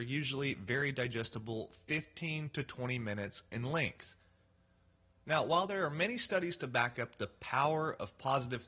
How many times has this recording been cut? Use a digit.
0